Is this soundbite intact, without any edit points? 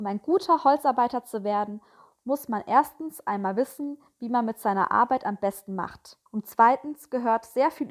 no; 1 cut; at 6.3 s

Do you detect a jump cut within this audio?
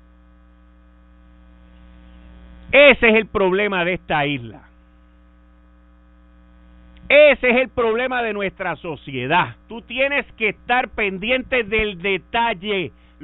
yes; 1 cut; at 9.6 s

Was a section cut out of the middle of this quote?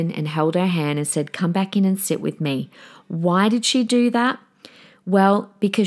no; 0 cuts

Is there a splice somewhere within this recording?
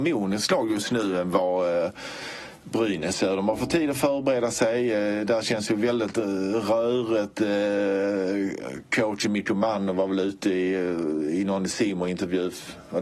no; 0 cuts

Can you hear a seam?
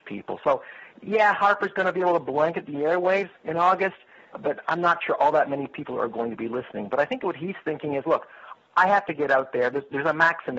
yes; 1 cut; at 3.4 s

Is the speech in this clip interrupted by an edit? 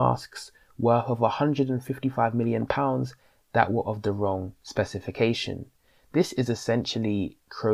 no; 0 cuts

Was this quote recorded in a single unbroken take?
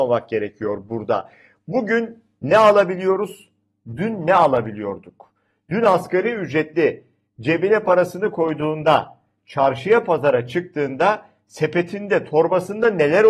yes; 0 cuts

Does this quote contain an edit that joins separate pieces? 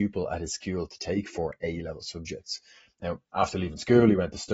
no; 0 cuts

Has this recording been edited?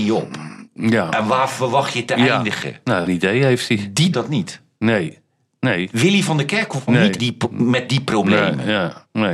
yes; 4 cuts; at 3.1 s, 4.1 s, 6.9 s, 7.2 s

